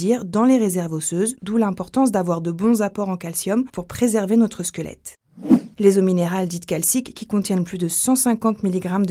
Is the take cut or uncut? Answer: cut